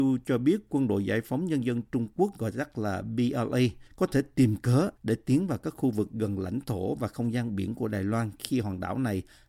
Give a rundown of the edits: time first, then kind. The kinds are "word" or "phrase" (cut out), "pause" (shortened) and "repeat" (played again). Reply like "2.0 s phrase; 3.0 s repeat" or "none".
3.9 s pause; 5.0 s pause

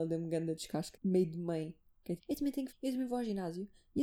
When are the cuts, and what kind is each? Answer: 0.9 s word; 2.2 s word; 2.7 s word

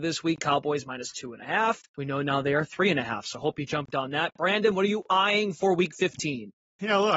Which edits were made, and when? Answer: 1.9 s pause

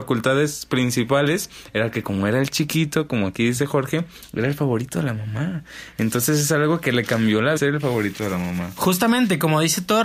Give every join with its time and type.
7.6 s word

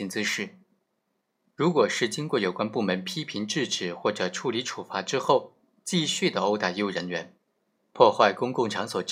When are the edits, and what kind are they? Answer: none

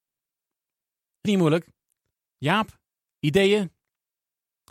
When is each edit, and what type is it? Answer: 1.2 s word; 3.0 s pause

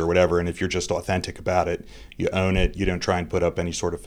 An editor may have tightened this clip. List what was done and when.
none

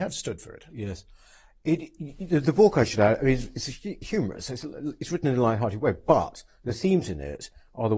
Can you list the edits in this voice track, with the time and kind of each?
none

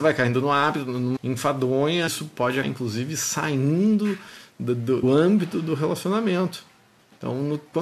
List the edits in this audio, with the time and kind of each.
1.2 s word; 2.1 s word; 2.6 s word; 5.0 s word

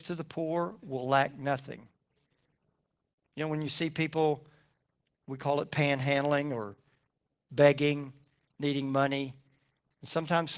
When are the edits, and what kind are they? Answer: none

